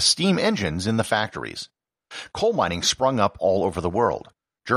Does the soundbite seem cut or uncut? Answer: uncut